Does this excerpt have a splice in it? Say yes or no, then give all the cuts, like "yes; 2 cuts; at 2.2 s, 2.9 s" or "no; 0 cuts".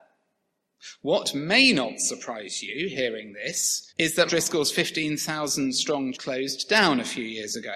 yes; 3 cuts; at 3.9 s, 4.3 s, 6.1 s